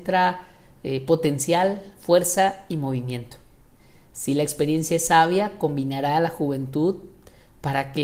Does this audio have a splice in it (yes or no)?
no